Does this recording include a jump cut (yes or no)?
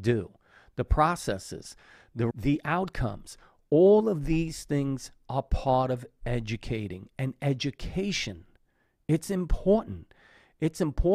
yes